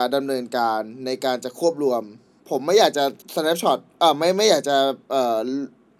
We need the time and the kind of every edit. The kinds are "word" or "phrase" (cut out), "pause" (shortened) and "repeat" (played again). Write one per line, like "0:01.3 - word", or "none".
0:03.2 - pause
0:05.0 - pause